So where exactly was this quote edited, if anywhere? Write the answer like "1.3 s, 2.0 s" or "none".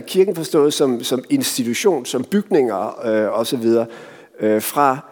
none